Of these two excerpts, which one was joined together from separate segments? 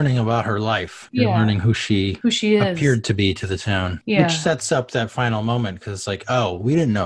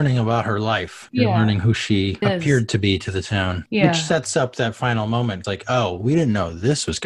second; 2 cuts; at 2.2 s, 5.4 s

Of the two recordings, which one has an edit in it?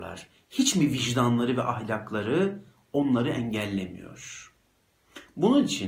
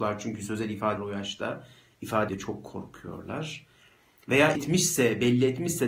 second; 3 cuts; at 1.0 s, 2.3 s, 4.5 s

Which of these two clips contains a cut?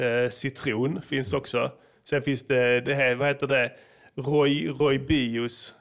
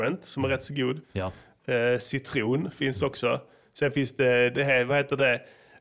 second; 1 cut; at 1.0 s

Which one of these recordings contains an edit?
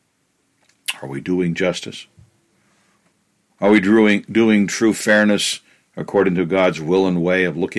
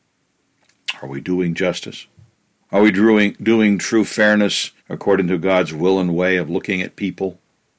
second; 2 cuts; at 2.3 s, 4.8 s

